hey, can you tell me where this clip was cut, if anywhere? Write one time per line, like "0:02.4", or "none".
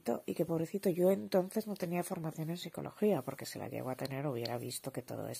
none